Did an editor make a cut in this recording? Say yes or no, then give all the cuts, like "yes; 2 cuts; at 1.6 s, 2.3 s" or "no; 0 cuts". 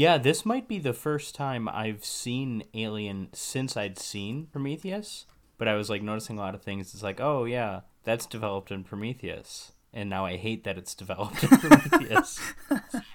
no; 0 cuts